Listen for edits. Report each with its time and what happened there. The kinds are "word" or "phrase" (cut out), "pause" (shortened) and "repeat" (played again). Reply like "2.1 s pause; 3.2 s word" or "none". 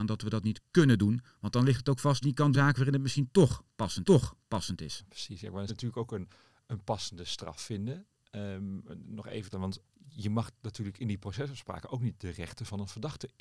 2.2 s phrase; 2.5 s phrase; 4.0 s repeat; 5.7 s phrase; 9.5 s phrase; 9.8 s pause

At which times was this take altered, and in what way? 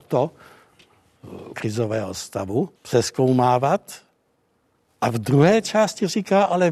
1.5 s phrase; 2.8 s pause

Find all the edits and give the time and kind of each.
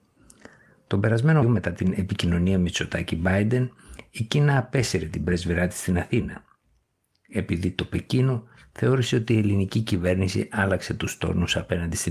1.4 s word

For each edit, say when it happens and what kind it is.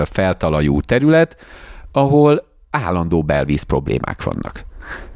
none

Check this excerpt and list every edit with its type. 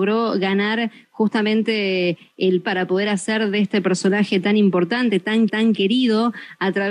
2.6 s word; 5.5 s repeat

